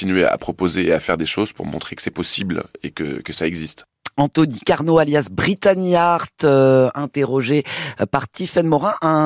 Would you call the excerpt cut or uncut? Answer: uncut